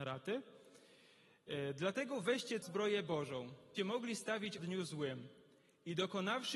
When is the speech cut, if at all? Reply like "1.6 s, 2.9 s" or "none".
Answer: 2.6 s, 3.8 s, 4.6 s